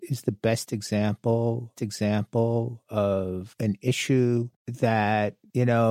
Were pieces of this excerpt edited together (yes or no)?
yes